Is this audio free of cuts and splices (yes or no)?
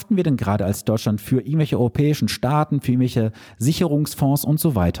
yes